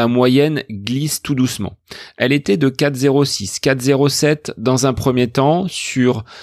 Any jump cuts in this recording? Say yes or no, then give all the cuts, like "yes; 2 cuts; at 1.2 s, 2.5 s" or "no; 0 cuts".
no; 0 cuts